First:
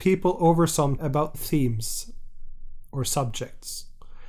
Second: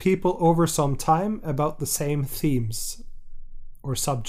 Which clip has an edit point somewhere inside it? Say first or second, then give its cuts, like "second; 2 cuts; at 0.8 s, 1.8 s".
first; 2 cuts; at 1.0 s, 1.3 s